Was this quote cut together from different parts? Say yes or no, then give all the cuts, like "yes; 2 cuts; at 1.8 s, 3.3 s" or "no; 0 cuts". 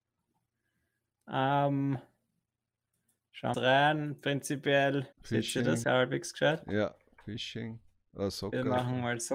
yes; 3 cuts; at 3.5 s, 5.1 s, 5.8 s